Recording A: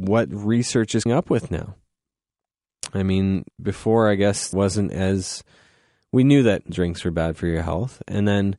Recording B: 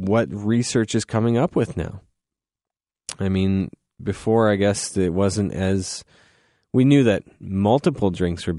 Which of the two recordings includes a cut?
A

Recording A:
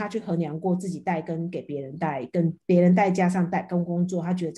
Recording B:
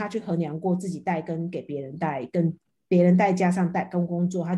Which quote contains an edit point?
A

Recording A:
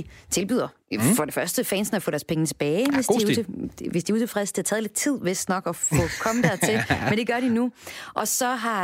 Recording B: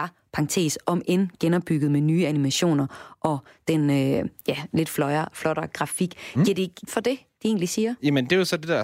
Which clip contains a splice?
B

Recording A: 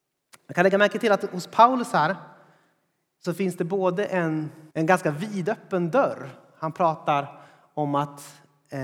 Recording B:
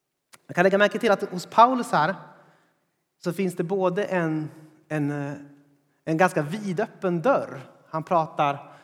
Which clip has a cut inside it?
A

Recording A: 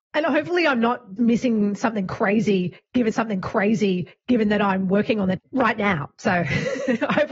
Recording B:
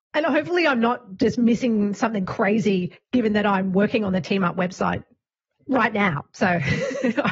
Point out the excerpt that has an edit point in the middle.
A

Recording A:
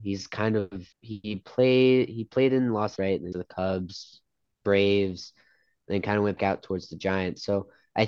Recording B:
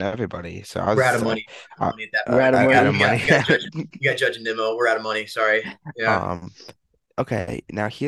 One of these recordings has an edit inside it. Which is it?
A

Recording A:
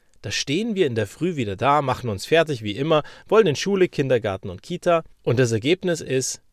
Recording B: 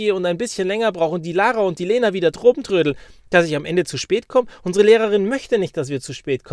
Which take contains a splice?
A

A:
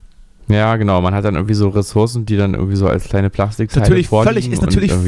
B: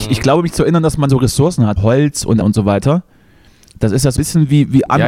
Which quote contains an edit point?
B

